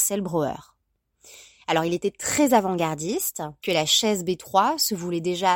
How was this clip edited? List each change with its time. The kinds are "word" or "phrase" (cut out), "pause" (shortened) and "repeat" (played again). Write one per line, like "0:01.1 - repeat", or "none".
0:03.6 - word

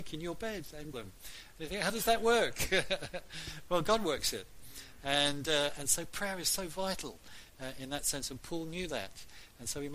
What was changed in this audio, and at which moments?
0:00.9 - phrase

